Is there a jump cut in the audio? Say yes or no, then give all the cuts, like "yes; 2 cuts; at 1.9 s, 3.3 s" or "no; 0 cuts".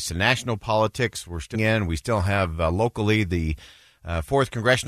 yes; 1 cut; at 1.5 s